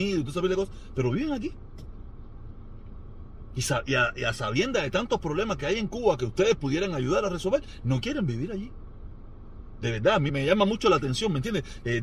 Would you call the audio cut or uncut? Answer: cut